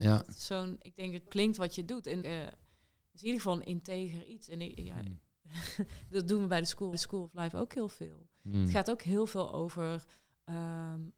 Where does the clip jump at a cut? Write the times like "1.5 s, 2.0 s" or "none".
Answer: 1.3 s, 2.2 s, 6.9 s